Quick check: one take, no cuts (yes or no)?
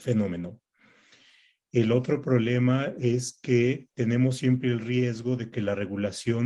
no